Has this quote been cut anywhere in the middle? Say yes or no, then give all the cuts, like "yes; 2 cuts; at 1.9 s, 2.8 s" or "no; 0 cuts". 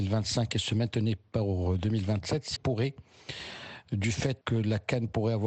yes; 2 cuts; at 2.6 s, 4.4 s